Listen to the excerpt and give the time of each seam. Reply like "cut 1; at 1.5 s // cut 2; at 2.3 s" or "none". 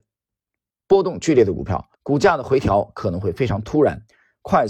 cut 1; at 1.9 s